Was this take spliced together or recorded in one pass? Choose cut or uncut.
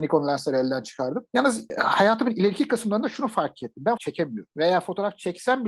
cut